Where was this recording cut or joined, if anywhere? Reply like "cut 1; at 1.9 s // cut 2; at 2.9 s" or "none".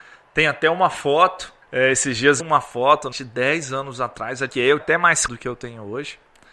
cut 1; at 1.6 s // cut 2; at 2.4 s // cut 3; at 3.1 s // cut 4; at 4.5 s // cut 5; at 4.8 s // cut 6; at 5.3 s